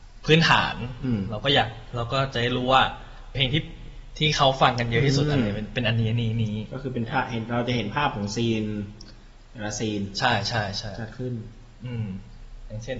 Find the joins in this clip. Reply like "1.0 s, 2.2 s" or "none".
3.3 s